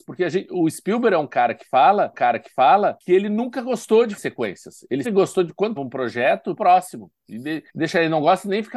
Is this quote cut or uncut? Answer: cut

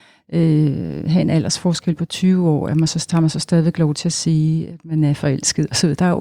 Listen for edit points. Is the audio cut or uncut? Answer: uncut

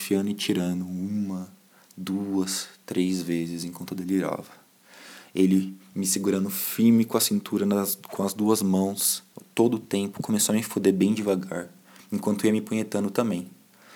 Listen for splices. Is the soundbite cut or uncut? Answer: uncut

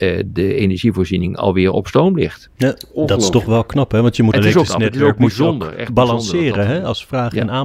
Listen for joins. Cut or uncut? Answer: cut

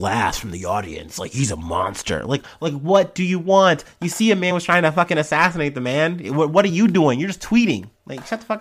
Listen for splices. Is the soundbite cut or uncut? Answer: uncut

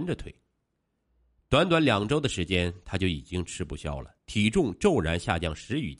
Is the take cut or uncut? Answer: cut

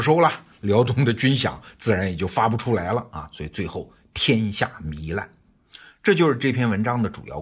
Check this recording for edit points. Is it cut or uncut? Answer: uncut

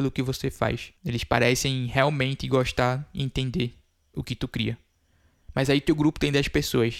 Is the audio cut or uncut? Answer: uncut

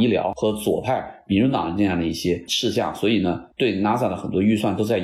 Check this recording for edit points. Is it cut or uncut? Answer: uncut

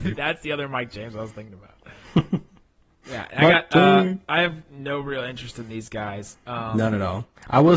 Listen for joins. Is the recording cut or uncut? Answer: cut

